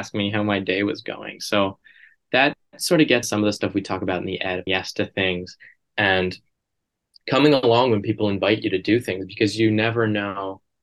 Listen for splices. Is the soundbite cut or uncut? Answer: cut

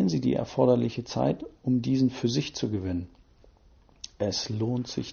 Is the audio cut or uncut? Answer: uncut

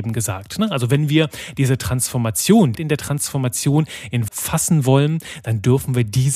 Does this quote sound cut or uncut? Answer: cut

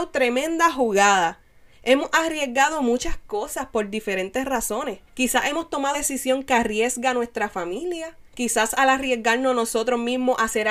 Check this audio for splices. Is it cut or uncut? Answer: cut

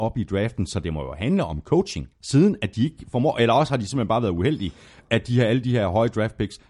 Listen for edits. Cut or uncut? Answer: cut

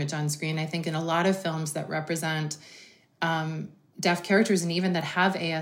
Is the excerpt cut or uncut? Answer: uncut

